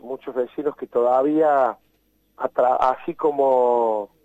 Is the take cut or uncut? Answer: uncut